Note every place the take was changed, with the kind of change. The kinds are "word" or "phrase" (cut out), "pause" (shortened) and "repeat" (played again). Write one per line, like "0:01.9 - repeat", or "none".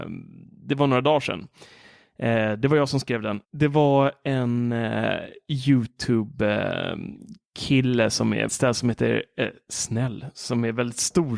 0:03.4 - pause
0:08.5 - word